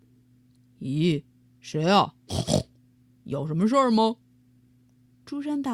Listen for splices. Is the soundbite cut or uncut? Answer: uncut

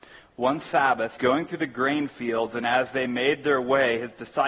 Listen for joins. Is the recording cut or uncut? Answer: cut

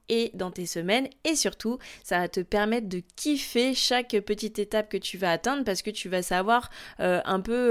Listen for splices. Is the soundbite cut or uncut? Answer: uncut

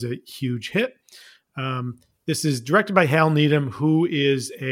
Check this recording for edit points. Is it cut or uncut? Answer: uncut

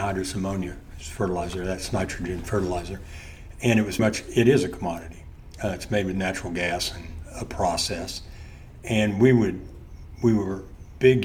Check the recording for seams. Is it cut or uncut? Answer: cut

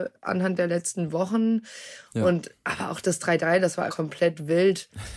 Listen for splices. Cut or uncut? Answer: cut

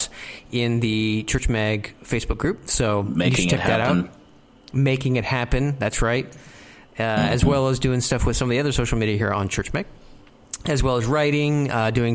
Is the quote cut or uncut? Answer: uncut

